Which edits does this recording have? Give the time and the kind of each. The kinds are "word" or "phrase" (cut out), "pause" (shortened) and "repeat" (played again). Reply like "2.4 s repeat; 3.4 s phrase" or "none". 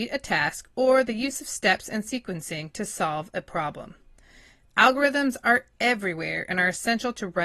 none